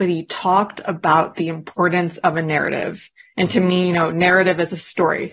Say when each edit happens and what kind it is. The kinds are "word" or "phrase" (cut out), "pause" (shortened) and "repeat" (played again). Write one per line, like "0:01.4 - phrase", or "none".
none

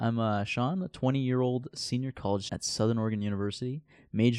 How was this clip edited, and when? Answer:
0:02.5 - word

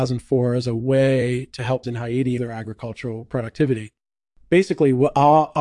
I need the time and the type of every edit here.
0:01.8 - word
0:02.4 - word

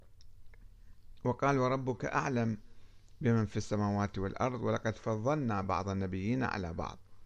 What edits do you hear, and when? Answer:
none

